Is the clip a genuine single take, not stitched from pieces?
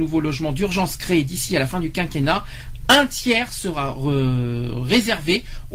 yes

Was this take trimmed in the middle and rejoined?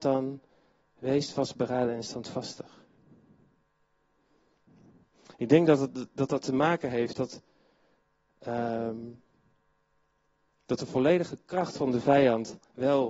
no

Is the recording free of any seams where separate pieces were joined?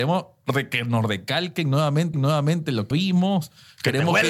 no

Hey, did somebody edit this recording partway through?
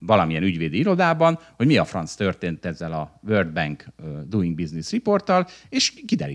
no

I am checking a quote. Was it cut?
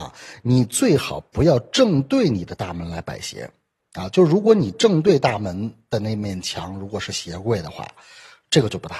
no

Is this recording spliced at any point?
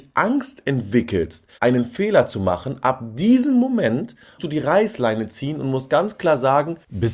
yes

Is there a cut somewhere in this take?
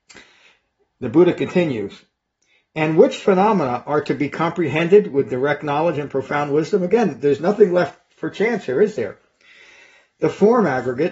no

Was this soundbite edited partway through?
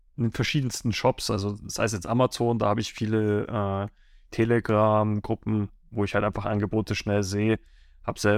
no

